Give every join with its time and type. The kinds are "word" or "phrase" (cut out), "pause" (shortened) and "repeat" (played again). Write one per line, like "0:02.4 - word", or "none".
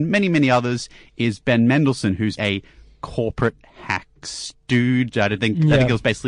0:02.4 - word